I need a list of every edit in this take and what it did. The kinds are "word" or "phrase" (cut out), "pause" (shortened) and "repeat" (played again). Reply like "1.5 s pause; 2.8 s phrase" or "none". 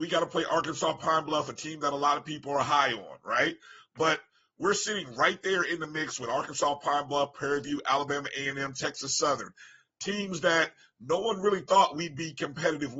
none